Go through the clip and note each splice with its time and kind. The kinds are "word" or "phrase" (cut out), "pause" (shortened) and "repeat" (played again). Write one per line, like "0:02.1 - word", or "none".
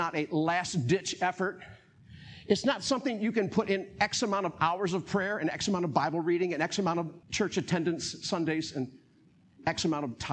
0:07.2 - pause